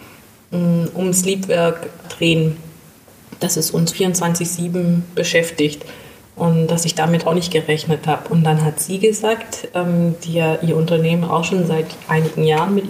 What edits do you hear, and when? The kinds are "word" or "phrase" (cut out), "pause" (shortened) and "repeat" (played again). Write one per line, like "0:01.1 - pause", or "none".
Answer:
0:02.0 - word
0:03.9 - word
0:07.2 - word